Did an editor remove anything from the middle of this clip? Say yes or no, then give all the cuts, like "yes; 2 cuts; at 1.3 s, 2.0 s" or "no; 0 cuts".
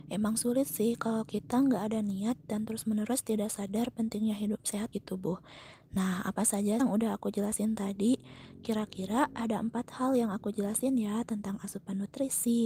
yes; 2 cuts; at 4.9 s, 6.8 s